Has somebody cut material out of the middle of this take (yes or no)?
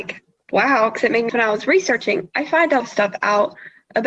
yes